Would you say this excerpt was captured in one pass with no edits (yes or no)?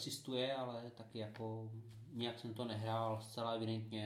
yes